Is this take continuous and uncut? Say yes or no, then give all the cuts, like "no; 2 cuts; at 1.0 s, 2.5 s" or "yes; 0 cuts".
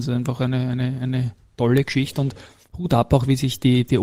yes; 0 cuts